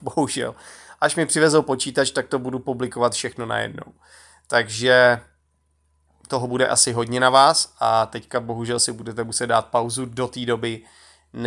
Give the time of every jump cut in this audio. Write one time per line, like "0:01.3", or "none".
none